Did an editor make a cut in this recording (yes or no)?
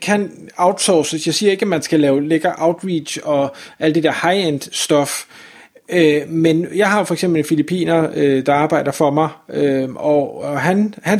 no